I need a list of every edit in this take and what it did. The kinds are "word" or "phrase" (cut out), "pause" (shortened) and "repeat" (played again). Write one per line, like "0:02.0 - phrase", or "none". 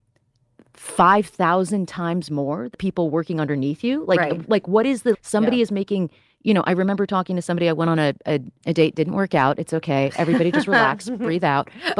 0:02.7 - word
0:05.1 - word
0:08.6 - word